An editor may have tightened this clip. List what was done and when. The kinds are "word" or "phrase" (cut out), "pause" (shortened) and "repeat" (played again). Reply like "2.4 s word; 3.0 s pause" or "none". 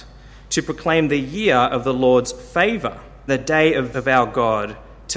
3.3 s word; 3.9 s word